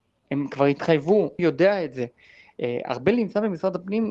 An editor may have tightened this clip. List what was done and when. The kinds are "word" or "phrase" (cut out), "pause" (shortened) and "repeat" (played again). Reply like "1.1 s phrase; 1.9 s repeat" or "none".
1.4 s phrase